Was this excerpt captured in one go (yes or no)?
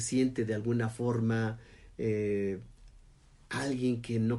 yes